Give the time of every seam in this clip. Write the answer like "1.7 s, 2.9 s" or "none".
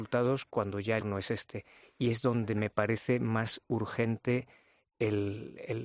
1.0 s